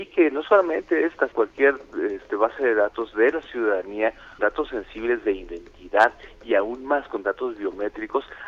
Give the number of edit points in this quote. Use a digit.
2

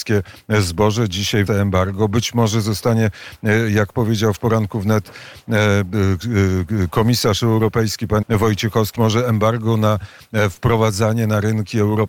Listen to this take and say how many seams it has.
4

